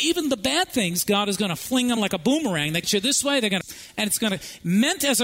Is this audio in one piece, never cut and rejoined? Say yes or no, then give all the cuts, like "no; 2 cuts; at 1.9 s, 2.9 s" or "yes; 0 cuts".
no; 3 cuts; at 2.0 s, 2.8 s, 3.6 s